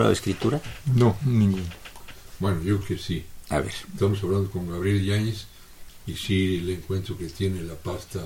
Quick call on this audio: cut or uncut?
cut